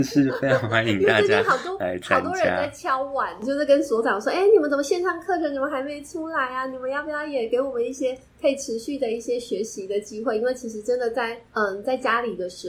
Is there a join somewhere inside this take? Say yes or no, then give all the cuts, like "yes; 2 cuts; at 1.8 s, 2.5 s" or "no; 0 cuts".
yes; 1 cut; at 11.5 s